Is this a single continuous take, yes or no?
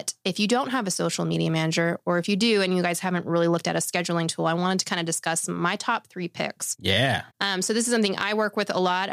yes